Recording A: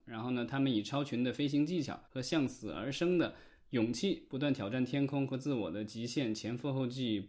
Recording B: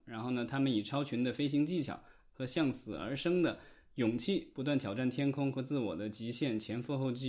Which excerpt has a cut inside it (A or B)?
A